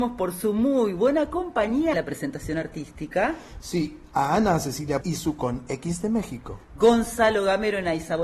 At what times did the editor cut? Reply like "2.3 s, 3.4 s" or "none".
1.9 s, 5.0 s